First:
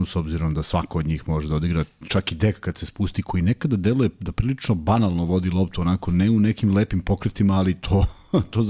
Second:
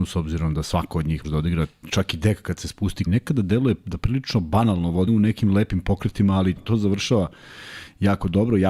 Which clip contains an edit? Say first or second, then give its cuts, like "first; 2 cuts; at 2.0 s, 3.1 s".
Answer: second; 4 cuts; at 1.2 s, 3.1 s, 5.1 s, 6.6 s